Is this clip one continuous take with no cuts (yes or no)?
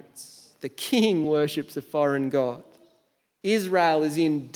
yes